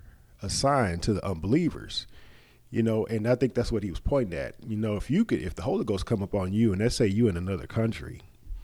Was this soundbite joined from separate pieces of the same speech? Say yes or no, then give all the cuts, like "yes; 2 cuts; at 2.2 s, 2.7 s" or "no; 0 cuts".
no; 0 cuts